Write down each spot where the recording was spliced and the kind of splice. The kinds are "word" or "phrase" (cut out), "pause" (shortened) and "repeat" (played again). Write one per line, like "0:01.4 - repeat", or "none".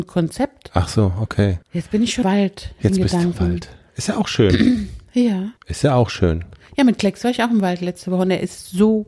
0:01.6 - pause
0:02.2 - word
0:05.6 - pause